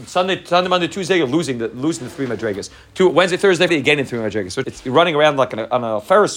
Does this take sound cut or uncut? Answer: cut